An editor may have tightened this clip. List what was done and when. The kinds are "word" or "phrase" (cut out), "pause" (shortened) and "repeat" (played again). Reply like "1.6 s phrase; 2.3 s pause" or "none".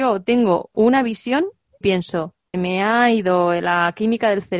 1.8 s word; 2.5 s word